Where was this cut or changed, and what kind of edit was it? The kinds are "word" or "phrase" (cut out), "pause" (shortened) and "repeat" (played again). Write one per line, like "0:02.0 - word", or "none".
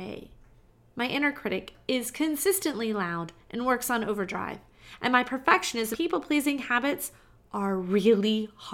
0:05.9 - word